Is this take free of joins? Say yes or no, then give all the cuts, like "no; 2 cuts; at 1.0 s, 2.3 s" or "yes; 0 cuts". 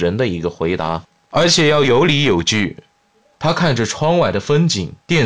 yes; 0 cuts